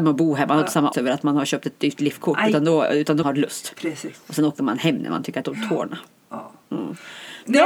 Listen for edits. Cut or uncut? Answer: cut